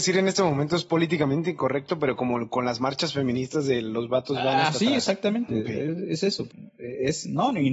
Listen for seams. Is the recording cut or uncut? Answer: uncut